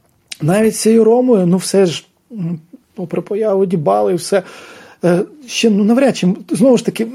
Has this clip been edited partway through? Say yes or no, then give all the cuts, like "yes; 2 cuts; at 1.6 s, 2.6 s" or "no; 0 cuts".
no; 0 cuts